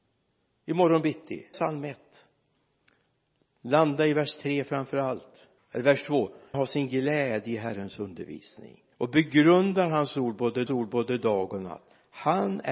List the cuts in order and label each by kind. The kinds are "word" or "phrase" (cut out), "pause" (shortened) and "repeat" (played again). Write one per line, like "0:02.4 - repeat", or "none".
0:01.5 - word
0:05.6 - pause
0:06.5 - word
0:08.9 - pause
0:10.7 - repeat